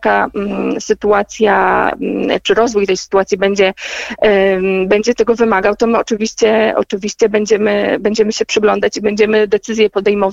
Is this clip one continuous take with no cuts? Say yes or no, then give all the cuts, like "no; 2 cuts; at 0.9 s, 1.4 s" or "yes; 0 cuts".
yes; 0 cuts